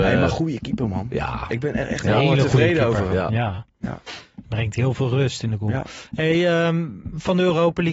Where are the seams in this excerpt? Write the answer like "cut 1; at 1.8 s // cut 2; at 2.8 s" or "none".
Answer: none